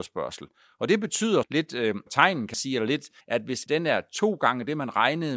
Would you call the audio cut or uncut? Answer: cut